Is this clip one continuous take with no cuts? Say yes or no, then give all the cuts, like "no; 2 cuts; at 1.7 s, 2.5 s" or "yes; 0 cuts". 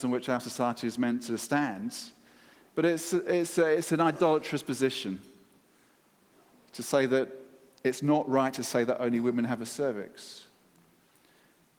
yes; 0 cuts